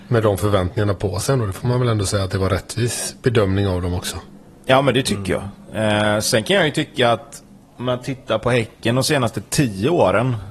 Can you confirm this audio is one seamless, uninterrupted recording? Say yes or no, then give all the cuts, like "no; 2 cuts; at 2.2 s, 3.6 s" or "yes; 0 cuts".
yes; 0 cuts